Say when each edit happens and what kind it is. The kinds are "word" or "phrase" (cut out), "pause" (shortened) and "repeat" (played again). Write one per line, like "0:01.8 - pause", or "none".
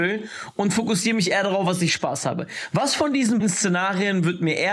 0:03.4 - word